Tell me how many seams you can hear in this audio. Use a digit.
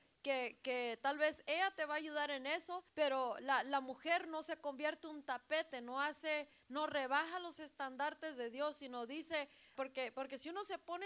2